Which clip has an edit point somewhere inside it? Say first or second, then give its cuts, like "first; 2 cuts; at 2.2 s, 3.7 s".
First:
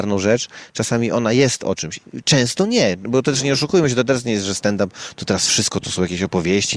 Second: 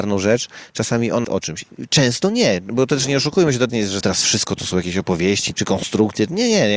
second; 4 cuts; at 1.2 s, 3.7 s, 4.0 s, 5.5 s